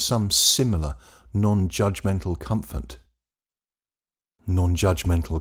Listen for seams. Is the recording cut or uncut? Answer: uncut